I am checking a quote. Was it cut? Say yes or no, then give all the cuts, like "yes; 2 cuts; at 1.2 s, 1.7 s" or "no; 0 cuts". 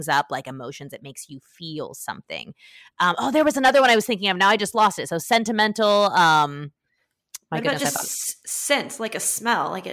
no; 0 cuts